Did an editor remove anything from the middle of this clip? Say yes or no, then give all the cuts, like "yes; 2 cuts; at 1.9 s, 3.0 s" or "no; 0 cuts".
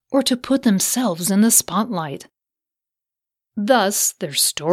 no; 0 cuts